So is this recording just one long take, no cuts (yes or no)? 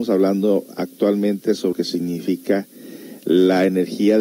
no